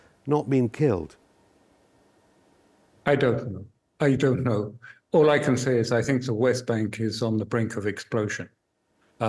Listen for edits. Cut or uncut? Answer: uncut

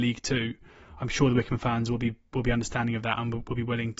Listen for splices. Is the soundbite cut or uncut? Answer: uncut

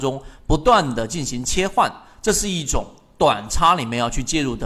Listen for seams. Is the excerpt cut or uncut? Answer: uncut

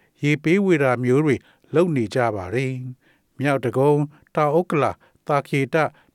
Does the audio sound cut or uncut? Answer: uncut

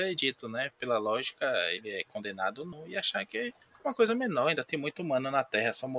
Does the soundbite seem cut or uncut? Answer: uncut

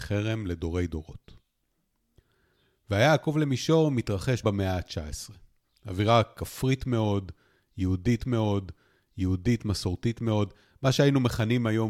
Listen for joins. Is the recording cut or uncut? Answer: cut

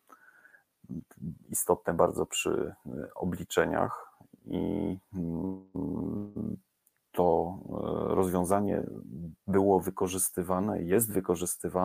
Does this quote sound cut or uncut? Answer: uncut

